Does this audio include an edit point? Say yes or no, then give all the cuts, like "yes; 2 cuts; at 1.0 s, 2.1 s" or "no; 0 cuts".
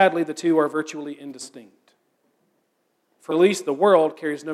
yes; 1 cut; at 3.3 s